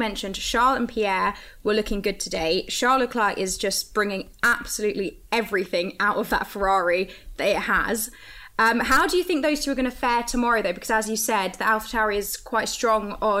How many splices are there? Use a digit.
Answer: 0